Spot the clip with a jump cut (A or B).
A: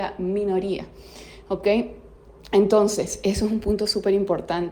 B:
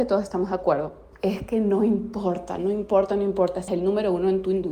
B